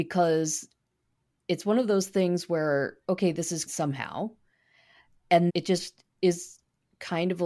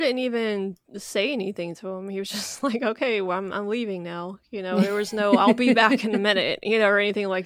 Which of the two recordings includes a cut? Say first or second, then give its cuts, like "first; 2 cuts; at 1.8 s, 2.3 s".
first; 2 cuts; at 3.7 s, 5.5 s